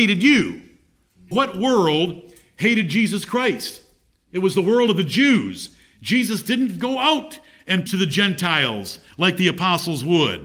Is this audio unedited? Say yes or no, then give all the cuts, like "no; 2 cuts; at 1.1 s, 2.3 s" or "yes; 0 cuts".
no; 2 cuts; at 1.3 s, 7.9 s